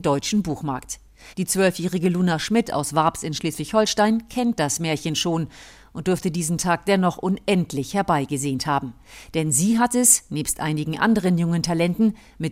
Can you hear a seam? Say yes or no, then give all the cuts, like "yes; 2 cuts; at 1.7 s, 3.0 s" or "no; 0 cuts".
no; 0 cuts